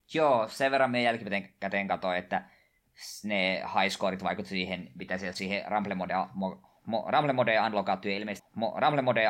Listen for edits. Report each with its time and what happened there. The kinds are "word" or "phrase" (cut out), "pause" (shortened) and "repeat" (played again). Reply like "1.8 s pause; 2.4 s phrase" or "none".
5.3 s word; 8.4 s repeat